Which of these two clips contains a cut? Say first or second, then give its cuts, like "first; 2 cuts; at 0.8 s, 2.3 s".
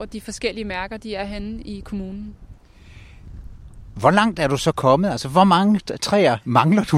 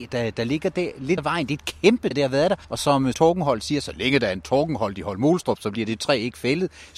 second; 4 cuts; at 1.2 s, 2.1 s, 2.6 s, 3.1 s